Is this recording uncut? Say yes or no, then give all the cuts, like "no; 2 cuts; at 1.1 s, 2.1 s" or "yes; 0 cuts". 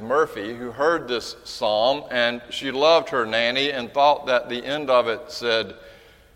yes; 0 cuts